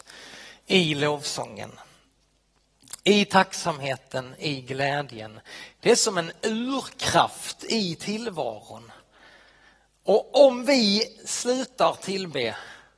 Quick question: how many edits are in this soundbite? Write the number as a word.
zero